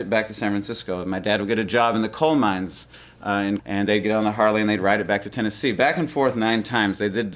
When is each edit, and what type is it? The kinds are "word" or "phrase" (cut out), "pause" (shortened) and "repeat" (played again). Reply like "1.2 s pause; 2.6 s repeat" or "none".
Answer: 3.6 s word